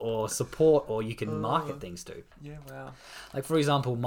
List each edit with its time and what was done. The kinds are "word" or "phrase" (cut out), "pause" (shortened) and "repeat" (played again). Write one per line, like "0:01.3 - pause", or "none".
0:02.3 - pause